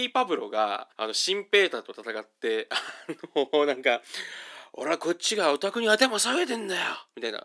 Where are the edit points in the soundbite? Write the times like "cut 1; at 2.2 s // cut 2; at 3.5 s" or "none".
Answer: cut 1; at 0.9 s